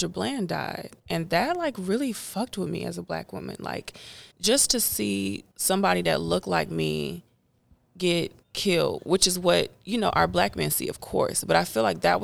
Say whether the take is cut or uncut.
cut